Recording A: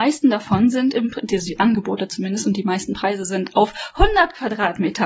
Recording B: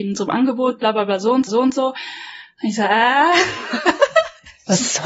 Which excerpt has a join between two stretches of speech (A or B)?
B